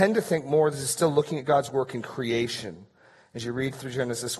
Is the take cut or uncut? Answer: uncut